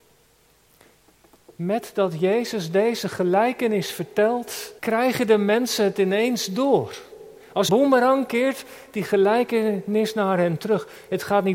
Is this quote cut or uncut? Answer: cut